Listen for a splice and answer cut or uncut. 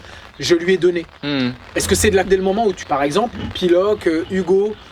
cut